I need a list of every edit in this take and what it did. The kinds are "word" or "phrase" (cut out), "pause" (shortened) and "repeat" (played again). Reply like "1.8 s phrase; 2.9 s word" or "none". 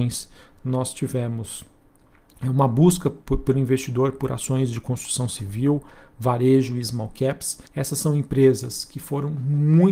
7.7 s pause